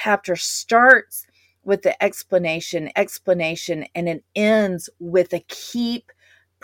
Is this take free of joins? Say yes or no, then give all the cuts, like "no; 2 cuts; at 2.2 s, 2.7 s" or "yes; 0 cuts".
no; 1 cut; at 2.9 s